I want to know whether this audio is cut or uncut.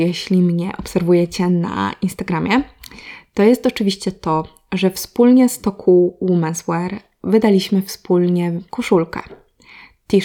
cut